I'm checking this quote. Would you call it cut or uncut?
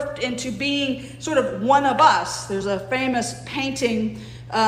uncut